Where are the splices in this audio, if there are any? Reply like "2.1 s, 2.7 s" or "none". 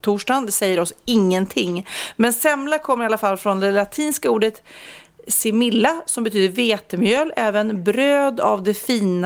none